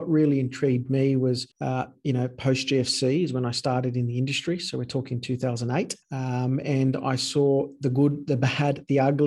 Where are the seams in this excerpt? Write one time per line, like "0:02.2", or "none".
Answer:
0:01.5
0:06.0